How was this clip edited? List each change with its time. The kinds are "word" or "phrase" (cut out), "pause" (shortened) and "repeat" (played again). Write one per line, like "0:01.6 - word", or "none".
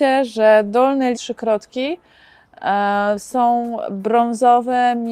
0:01.1 - word